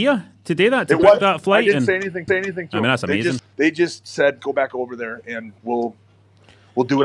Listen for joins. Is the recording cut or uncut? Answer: cut